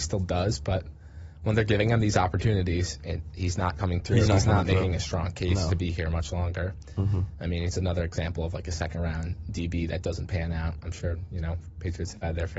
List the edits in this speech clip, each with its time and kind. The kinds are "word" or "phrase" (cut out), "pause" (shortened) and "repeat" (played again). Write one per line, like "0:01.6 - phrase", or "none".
none